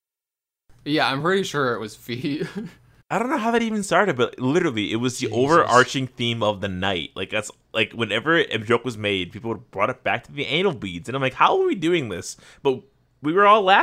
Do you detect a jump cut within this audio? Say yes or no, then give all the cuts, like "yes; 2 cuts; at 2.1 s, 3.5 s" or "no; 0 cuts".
no; 0 cuts